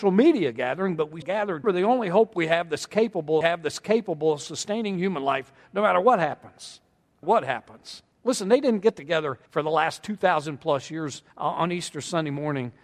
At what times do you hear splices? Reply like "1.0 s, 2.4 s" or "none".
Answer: 1.2 s, 1.6 s, 3.4 s, 7.2 s, 8.1 s, 9.5 s, 11.3 s